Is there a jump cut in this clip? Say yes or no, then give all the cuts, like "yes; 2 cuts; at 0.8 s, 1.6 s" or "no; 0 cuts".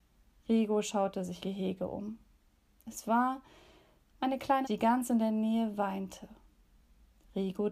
yes; 2 cuts; at 1.4 s, 4.6 s